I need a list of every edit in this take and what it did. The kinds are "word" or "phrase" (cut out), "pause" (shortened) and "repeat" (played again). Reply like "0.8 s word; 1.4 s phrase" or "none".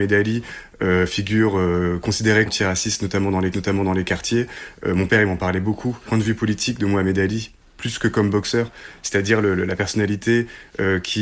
2.5 s word; 3.5 s repeat; 6.1 s word